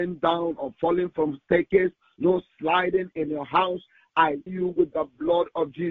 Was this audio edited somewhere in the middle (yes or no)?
yes